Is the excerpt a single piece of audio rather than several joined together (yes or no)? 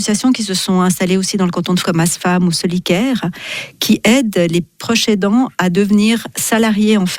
no